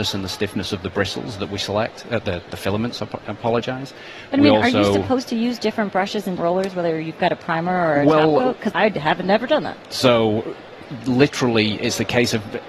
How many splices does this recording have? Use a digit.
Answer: 2